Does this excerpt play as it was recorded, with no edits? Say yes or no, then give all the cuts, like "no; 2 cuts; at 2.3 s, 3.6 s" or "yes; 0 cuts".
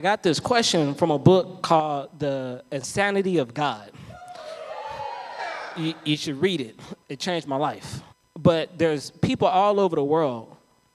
no; 2 cuts; at 7.0 s, 8.1 s